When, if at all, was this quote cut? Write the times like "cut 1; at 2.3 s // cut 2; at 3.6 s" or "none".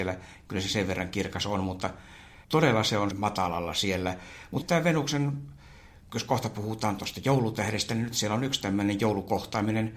cut 1; at 2.4 s // cut 2; at 3.1 s // cut 3; at 4.6 s // cut 4; at 6.0 s